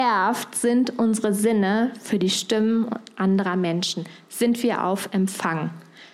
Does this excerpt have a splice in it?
no; 0 cuts

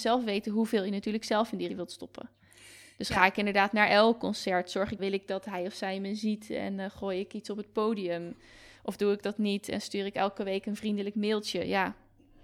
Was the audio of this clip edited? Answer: yes; 2 cuts; at 1.7 s, 5.0 s

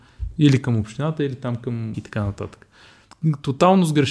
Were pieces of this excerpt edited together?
yes; 1 cut; at 1.9 s

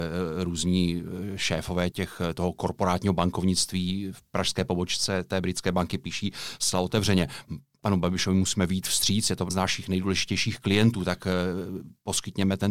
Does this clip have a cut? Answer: yes; 2 cuts; at 1.9 s, 9.5 s

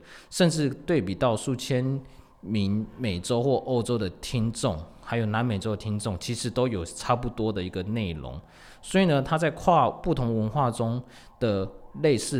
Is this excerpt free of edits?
yes; 0 cuts

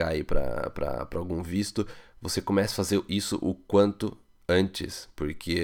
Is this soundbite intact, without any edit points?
yes; 0 cuts

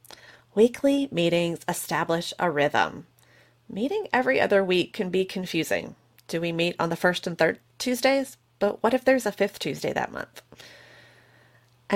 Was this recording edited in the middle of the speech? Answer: no; 0 cuts

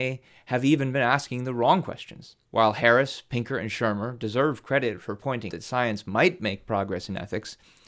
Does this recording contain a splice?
yes; 2 cuts; at 2.5 s, 5.5 s

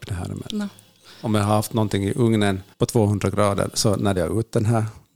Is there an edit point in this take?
yes; 2 cuts; at 2.7 s, 4.2 s

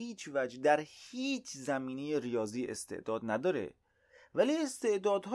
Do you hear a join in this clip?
no; 0 cuts

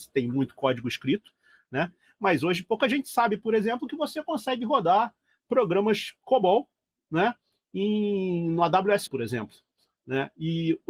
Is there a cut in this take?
yes; 1 cut; at 9.1 s

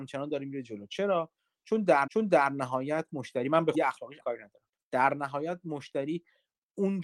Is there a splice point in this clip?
yes; 4 cuts; at 2.1 s, 3.7 s, 4.2 s, 4.8 s

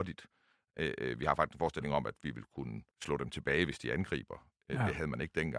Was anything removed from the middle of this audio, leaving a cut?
yes; 1 cut; at 2.9 s

